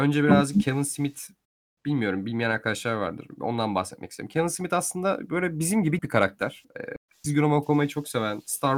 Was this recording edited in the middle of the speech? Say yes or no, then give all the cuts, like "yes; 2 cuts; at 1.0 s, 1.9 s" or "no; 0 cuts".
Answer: yes; 1 cut; at 6.0 s